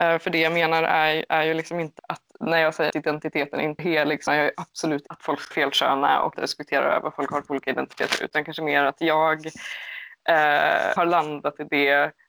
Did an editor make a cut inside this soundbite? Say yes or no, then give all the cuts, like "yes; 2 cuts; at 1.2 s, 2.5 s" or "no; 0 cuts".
yes; 8 cuts; at 2.0 s, 2.9 s, 3.8 s, 4.3 s, 5.1 s, 5.5 s, 6.3 s, 11.0 s